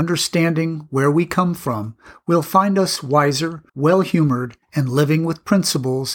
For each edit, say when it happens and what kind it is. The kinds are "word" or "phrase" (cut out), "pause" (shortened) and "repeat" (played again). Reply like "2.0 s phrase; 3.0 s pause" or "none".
3.7 s pause; 4.6 s pause